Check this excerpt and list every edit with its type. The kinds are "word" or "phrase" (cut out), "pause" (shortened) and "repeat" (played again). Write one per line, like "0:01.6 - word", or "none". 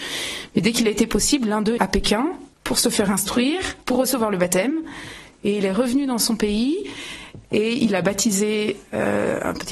0:01.8 - phrase
0:02.5 - pause